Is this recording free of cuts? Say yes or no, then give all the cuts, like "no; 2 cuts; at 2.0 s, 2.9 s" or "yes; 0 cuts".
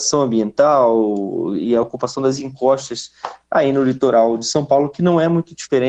yes; 0 cuts